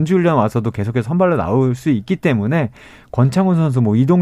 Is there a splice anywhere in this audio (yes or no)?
no